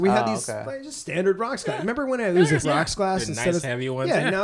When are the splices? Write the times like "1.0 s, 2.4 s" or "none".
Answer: 2.6 s